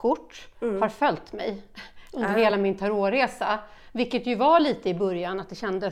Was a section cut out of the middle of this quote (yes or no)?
no